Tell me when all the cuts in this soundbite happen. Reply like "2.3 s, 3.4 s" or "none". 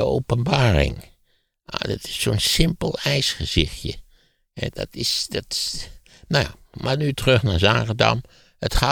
none